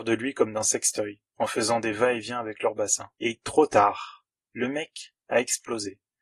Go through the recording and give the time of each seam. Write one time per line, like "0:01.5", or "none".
0:01.3
0:03.2

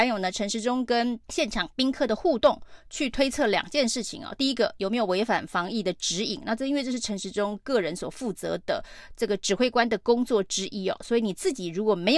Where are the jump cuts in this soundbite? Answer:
0:01.2

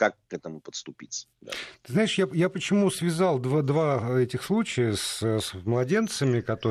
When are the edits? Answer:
none

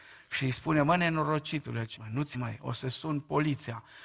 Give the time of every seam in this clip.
0:02.0
0:02.3

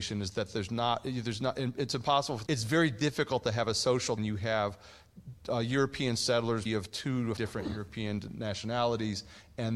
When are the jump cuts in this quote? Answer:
0:02.5
0:04.2
0:06.7
0:07.4

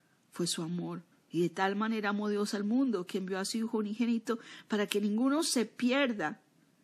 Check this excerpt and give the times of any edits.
0:01.1

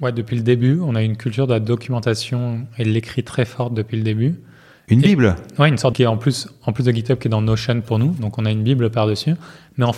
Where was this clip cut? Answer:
0:05.9

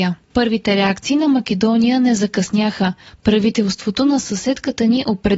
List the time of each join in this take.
none

